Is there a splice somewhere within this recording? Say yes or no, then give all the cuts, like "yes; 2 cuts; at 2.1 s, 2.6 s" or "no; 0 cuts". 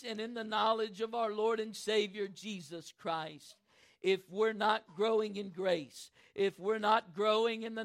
no; 0 cuts